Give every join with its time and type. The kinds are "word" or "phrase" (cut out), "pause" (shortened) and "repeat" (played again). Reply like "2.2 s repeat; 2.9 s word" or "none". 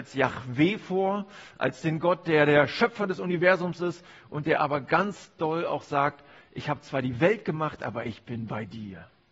none